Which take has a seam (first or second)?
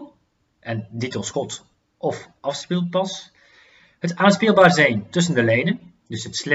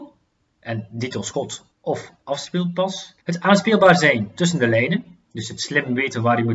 second